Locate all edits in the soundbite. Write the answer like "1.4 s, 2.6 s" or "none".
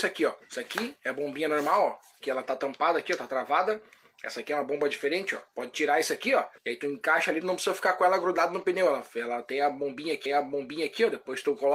5.5 s, 6.6 s, 7.4 s, 10.3 s